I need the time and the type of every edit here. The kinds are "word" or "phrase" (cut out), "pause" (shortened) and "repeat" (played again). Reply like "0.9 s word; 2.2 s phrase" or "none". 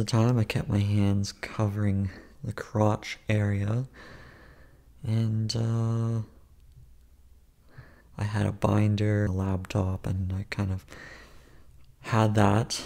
9.3 s word